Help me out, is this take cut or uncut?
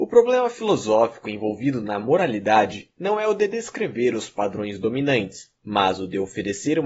uncut